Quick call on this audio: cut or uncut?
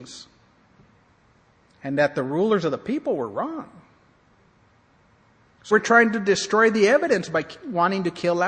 cut